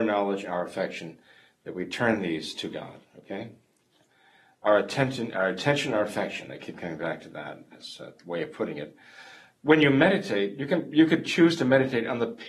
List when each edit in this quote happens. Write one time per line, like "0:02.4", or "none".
none